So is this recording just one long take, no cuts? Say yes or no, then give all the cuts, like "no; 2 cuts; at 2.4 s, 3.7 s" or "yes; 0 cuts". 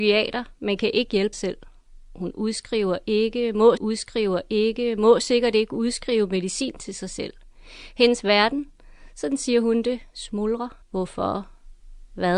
no; 3 cuts; at 1.3 s, 3.8 s, 10.8 s